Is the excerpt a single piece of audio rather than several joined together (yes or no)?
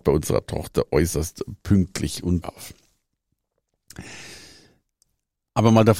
no